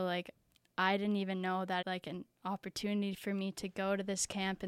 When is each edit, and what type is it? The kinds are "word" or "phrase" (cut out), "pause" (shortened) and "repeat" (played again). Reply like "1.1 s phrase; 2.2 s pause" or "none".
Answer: 1.8 s phrase